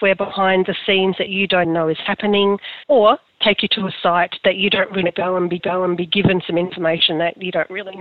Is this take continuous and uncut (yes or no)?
no